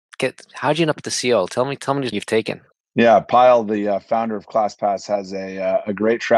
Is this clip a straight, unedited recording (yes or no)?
no